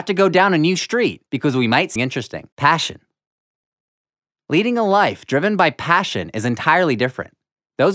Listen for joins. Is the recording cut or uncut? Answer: cut